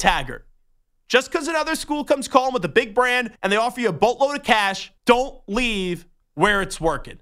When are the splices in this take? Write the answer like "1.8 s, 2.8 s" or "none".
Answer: 3.4 s, 5.0 s, 6.2 s